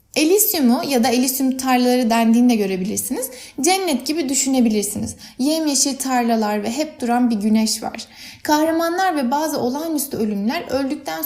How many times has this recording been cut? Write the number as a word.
one